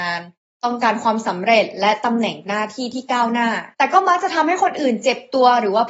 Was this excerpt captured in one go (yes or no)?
no